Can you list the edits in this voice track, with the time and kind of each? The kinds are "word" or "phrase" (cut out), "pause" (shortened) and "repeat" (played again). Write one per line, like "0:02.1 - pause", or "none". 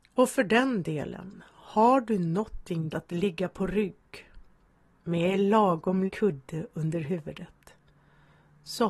0:02.9 - word
0:06.1 - word